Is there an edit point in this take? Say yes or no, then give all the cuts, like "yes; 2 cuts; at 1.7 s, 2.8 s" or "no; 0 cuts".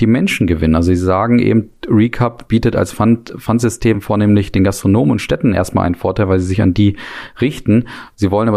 no; 0 cuts